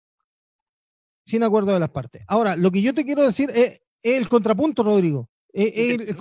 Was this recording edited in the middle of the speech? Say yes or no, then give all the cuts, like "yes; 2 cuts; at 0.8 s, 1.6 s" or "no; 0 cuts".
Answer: no; 0 cuts